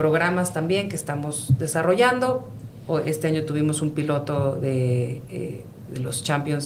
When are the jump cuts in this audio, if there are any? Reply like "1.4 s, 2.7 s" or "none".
none